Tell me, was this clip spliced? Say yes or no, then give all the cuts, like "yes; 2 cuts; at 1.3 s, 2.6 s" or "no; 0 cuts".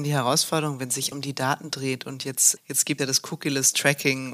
yes; 3 cuts; at 1.1 s, 2.6 s, 3.0 s